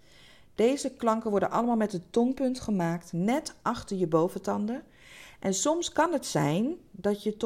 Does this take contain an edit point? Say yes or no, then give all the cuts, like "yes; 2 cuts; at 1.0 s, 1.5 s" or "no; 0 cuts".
no; 0 cuts